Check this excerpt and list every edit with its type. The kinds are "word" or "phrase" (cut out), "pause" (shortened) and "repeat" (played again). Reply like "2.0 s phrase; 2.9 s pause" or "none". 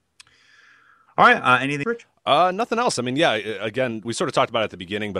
1.8 s word; 4.0 s word

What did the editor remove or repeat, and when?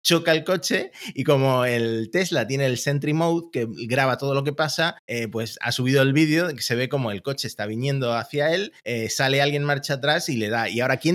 5.0 s pause; 8.8 s pause

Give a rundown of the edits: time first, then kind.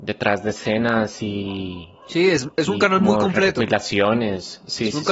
none

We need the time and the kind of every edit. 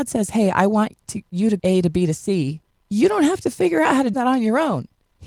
1.6 s phrase; 2.7 s pause; 4.1 s word

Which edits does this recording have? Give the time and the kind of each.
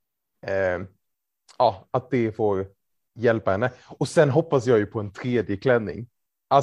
none

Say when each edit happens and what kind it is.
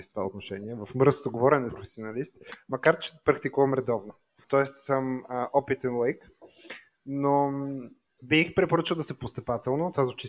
1.7 s word; 9.2 s word

